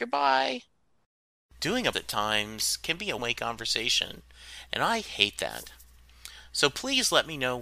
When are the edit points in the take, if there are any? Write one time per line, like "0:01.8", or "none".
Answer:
0:01.9
0:03.2